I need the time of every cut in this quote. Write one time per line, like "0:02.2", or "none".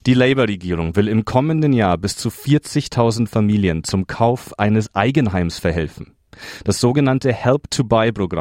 none